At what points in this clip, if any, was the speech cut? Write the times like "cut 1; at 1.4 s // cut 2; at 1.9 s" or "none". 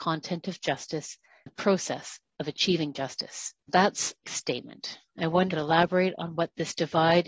cut 1; at 1.5 s // cut 2; at 3.6 s // cut 3; at 4.2 s // cut 4; at 5.5 s